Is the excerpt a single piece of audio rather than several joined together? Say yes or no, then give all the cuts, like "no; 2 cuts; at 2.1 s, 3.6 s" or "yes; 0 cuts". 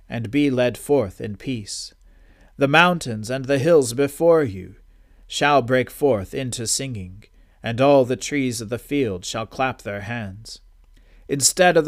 yes; 0 cuts